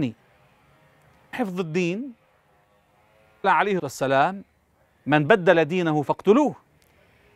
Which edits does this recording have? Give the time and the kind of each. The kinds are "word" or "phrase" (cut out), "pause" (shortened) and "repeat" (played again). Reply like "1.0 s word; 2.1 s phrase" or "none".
1.3 s word; 3.4 s word; 3.8 s word